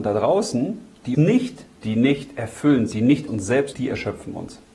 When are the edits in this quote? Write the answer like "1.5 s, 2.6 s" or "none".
1.1 s, 1.8 s, 2.9 s, 3.3 s, 3.7 s

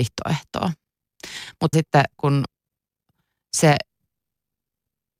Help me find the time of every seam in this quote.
1.7 s, 2.2 s

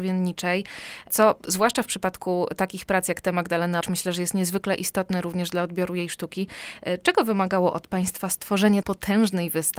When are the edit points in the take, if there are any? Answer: 3.8 s, 8.8 s

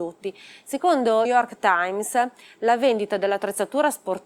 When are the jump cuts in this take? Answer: 1.2 s

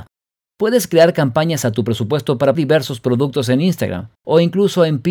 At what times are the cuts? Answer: 1.6 s, 2.5 s, 4.1 s

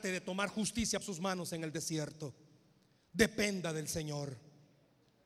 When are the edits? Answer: 1.0 s

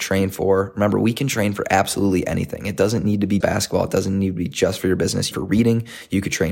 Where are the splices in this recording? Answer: 3.4 s, 5.3 s

